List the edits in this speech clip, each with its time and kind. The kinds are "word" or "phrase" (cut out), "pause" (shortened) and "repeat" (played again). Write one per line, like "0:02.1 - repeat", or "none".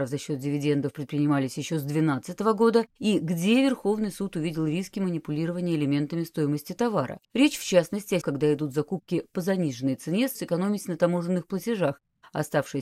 0:02.9 - pause
0:07.2 - pause
0:08.2 - word
0:10.3 - word

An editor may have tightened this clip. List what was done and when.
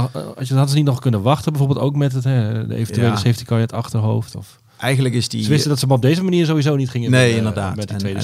none

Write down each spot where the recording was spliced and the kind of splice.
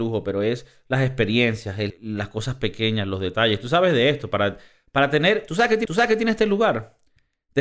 0:01.9 - word
0:05.8 - repeat

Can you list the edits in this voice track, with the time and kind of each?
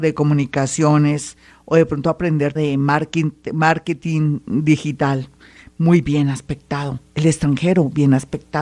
0:02.6 - phrase

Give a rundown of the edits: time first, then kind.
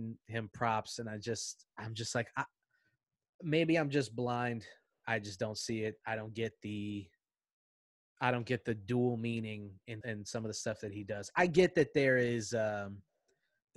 0:10.0 - word

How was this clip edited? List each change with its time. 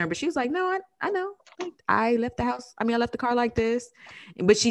0:01.8 - pause

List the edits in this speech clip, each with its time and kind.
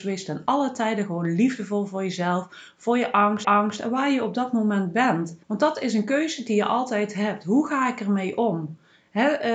0:03.4 - repeat
0:05.4 - pause

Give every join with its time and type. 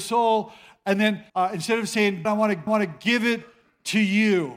0:01.3 - pause
0:02.2 - word
0:02.7 - repeat

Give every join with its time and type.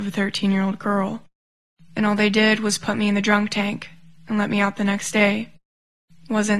none

